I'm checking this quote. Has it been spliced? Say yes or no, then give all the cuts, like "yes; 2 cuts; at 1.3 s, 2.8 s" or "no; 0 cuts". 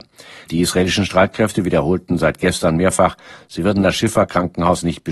no; 0 cuts